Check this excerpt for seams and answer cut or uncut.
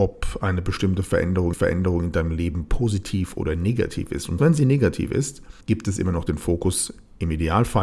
cut